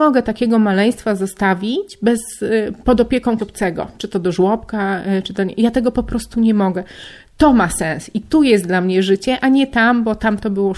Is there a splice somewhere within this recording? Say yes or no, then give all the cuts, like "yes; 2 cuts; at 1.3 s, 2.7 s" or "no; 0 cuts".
yes; 1 cut; at 3.4 s